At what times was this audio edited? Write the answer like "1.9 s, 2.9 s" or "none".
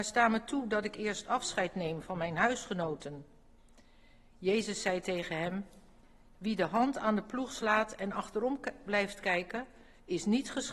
none